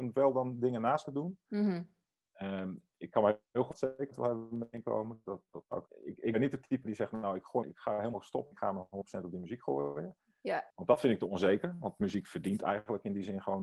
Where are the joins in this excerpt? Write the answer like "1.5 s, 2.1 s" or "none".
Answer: 1.0 s, 3.7 s, 5.9 s, 7.6 s, 8.5 s, 10.7 s

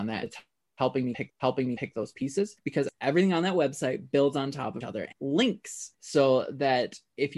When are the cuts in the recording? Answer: 1.3 s, 2.6 s, 4.8 s, 5.1 s, 5.9 s

